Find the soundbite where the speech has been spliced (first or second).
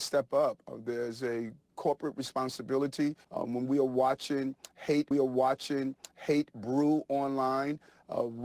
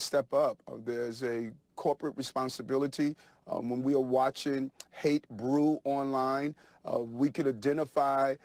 first